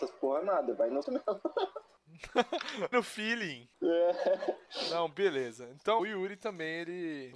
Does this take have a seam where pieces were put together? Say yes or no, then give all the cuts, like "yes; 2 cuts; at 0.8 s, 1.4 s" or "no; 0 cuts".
yes; 3 cuts; at 1.0 s, 2.9 s, 6.0 s